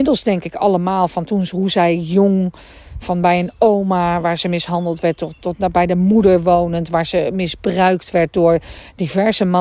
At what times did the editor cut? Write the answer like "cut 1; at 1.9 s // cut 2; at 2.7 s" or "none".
cut 1; at 3.0 s